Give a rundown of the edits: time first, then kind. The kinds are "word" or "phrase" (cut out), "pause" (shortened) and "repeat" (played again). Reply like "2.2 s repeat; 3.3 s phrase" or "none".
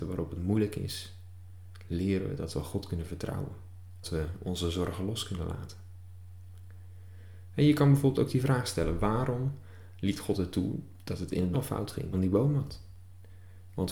4.0 s phrase; 11.5 s word; 12.1 s phrase